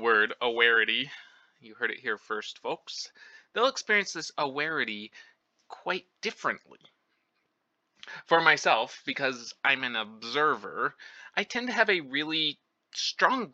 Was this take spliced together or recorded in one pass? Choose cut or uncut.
cut